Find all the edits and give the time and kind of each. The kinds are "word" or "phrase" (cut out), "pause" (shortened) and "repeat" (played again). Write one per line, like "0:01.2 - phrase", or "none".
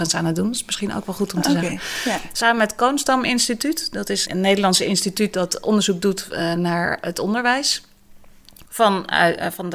0:04.3 - word